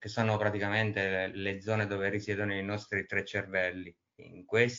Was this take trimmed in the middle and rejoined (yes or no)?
no